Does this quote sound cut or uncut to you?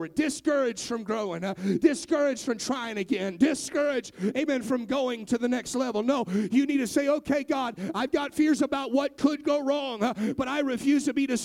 uncut